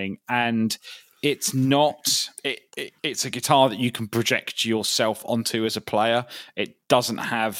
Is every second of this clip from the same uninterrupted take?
no; 2 cuts; at 2.4 s, 3.0 s

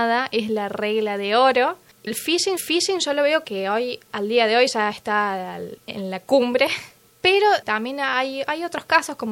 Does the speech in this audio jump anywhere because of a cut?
yes; 5 cuts; at 2.1 s, 2.6 s, 3.4 s, 4.1 s, 7.6 s

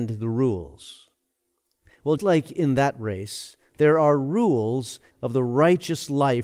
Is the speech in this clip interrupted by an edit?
yes; 2 cuts; at 2.2 s, 5.1 s

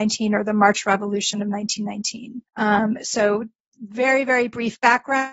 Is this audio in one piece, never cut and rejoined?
no; 1 cut; at 2.5 s

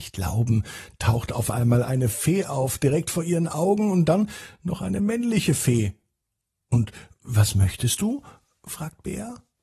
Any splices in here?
no; 0 cuts

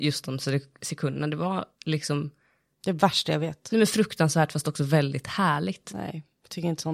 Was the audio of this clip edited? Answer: yes; 1 cut; at 1.7 s

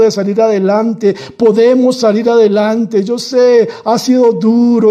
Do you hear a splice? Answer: no; 0 cuts

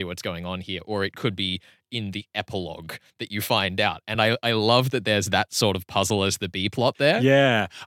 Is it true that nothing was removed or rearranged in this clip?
yes; 0 cuts

